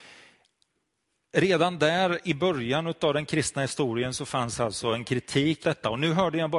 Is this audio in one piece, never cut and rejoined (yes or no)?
no